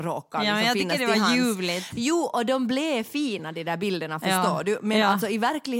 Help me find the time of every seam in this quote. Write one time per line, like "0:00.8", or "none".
none